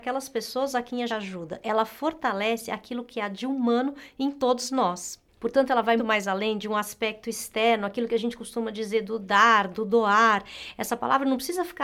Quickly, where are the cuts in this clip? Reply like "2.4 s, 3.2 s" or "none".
1.1 s, 6.0 s